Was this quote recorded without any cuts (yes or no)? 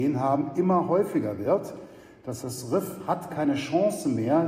no